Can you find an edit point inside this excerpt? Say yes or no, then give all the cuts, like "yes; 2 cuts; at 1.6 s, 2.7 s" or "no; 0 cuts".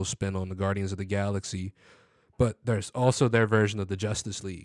no; 0 cuts